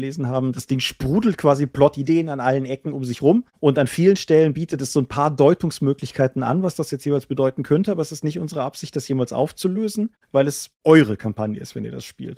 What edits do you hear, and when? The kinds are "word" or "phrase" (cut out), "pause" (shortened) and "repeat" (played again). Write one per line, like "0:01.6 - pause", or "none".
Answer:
none